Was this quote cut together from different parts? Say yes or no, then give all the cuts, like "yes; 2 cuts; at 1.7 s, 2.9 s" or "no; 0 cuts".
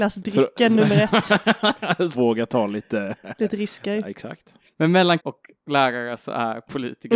yes; 2 cuts; at 2.1 s, 5.2 s